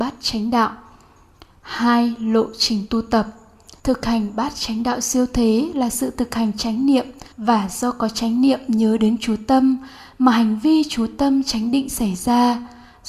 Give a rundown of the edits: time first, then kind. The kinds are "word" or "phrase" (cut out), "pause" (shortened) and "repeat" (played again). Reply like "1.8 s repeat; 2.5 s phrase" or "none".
3.8 s pause; 7.3 s pause